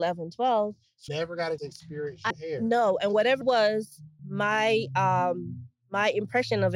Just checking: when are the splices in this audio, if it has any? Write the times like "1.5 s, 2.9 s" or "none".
1.1 s, 1.6 s, 2.3 s, 3.4 s, 4.2 s